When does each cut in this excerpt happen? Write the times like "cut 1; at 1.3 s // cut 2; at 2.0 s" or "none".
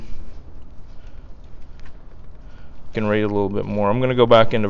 cut 1; at 2.9 s